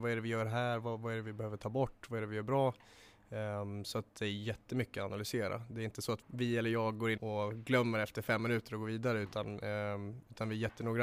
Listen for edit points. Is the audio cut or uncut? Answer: cut